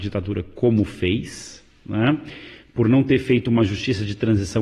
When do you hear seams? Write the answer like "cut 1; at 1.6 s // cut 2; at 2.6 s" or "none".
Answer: none